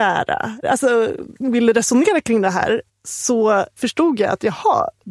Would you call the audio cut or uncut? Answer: cut